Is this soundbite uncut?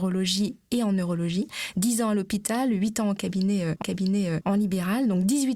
no; 1 cut; at 3.8 s

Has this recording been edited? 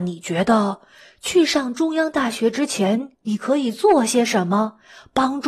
yes; 1 cut; at 3.1 s

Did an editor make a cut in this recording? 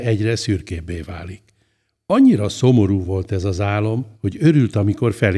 yes; 1 cut; at 4.1 s

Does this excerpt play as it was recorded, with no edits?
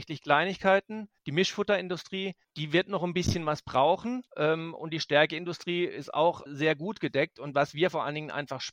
no; 3 cuts; at 1.2 s, 4.3 s, 6.5 s

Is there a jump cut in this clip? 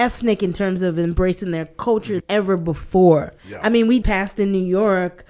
yes; 3 cuts; at 2.2 s, 3.4 s, 4.0 s

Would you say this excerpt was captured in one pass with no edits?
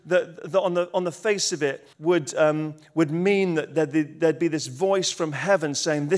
no; 1 cut; at 1.9 s

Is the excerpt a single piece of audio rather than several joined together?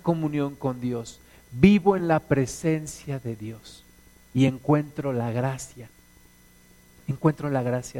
yes; 0 cuts

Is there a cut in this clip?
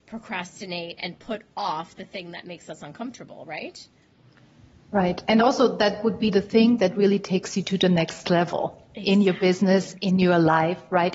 no; 0 cuts

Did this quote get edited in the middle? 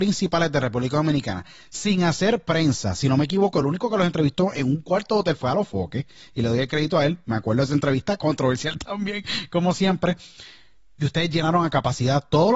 no; 0 cuts

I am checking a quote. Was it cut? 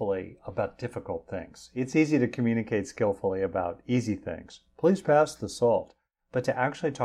no; 0 cuts

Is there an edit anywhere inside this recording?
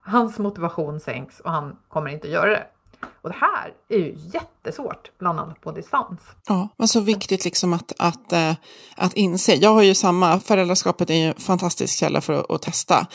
yes; 3 cuts; at 3.8 s, 6.4 s, 6.7 s

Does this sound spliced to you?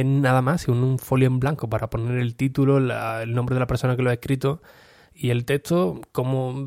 no; 0 cuts

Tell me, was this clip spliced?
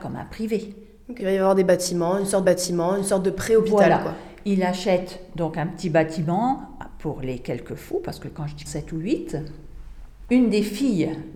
yes; 3 cuts; at 1.2 s, 2.4 s, 8.7 s

